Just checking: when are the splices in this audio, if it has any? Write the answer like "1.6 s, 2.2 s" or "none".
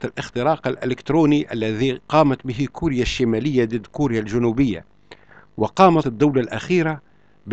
6.0 s